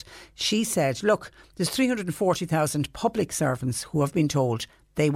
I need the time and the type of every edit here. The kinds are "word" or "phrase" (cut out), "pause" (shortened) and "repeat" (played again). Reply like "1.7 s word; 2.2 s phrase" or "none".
none